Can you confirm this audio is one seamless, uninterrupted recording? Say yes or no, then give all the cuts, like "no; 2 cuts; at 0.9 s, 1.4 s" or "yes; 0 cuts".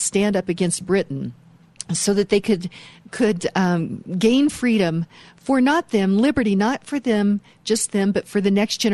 yes; 0 cuts